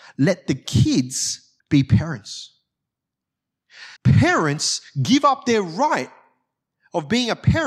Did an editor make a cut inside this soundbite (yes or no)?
yes